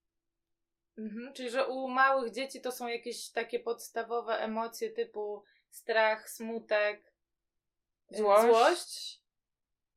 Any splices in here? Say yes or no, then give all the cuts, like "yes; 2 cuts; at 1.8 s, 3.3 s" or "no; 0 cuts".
no; 0 cuts